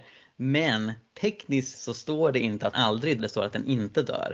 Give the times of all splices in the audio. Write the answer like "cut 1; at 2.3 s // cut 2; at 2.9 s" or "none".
cut 1; at 1.7 s // cut 2; at 2.7 s // cut 3; at 3.2 s